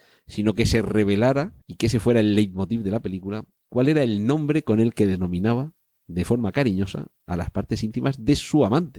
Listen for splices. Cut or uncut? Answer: cut